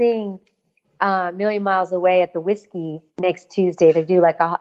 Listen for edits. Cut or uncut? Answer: cut